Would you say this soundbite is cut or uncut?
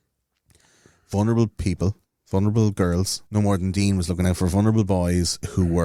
cut